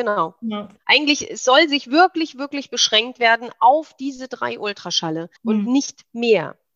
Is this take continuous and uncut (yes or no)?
no